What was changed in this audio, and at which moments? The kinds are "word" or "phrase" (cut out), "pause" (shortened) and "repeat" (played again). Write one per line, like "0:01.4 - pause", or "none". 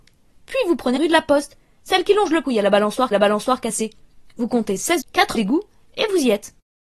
0:01.0 - word
0:02.4 - word
0:03.1 - repeat
0:05.0 - word
0:05.3 - word